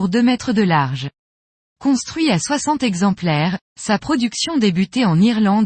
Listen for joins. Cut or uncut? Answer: uncut